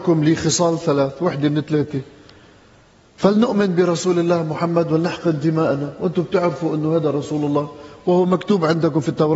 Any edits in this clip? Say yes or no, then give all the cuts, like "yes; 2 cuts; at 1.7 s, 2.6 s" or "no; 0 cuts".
no; 0 cuts